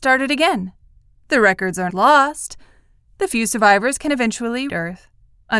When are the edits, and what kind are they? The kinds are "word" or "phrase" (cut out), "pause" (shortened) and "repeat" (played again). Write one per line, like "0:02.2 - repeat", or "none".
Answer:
0:01.9 - word
0:04.7 - word